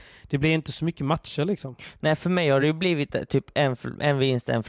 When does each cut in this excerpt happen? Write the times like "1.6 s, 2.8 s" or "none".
none